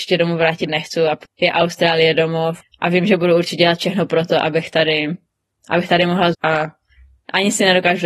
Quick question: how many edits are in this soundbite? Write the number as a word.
three